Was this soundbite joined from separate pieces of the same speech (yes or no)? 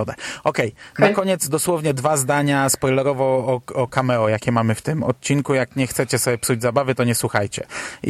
no